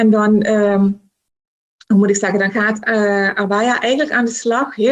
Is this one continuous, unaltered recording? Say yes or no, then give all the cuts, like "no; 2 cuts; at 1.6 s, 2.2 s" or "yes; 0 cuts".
yes; 0 cuts